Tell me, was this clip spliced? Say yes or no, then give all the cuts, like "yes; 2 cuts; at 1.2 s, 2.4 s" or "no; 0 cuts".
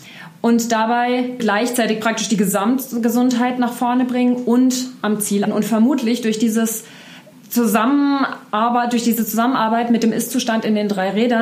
yes; 3 cuts; at 1.4 s, 5.4 s, 7.3 s